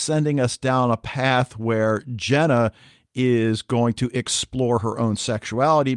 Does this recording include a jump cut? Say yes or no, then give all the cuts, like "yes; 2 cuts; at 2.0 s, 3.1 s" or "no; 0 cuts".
no; 0 cuts